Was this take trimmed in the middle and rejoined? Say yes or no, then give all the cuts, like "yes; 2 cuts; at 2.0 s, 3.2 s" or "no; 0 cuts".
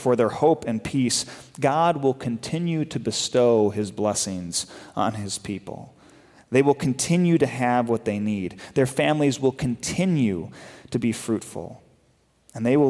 no; 0 cuts